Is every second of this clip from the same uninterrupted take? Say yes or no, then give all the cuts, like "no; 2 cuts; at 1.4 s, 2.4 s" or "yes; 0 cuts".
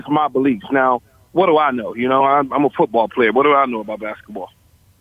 yes; 0 cuts